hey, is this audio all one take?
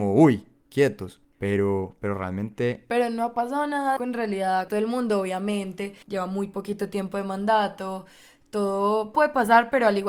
no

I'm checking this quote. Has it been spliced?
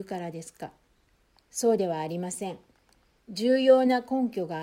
no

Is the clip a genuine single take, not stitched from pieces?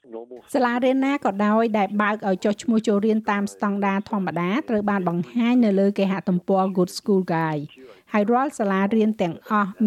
yes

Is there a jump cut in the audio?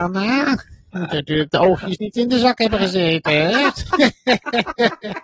no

